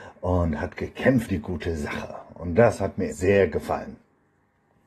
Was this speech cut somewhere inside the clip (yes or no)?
yes